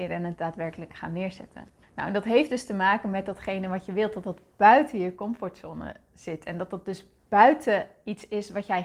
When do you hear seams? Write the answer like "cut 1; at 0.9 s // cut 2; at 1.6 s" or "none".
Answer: cut 1; at 1.8 s